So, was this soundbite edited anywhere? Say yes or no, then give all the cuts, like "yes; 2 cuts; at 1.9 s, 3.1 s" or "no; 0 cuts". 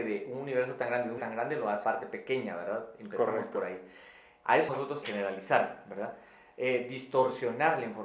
yes; 4 cuts; at 1.2 s, 1.8 s, 4.7 s, 5.0 s